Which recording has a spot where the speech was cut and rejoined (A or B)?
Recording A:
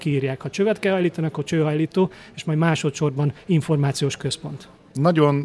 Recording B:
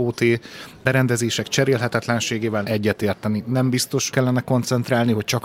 B